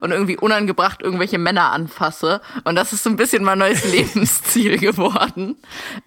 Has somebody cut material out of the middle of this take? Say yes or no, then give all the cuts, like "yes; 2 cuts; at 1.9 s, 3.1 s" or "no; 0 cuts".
no; 0 cuts